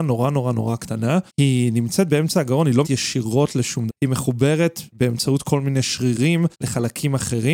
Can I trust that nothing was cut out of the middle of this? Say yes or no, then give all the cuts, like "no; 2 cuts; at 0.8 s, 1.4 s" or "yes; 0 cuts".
no; 4 cuts; at 1.3 s, 2.8 s, 3.9 s, 6.5 s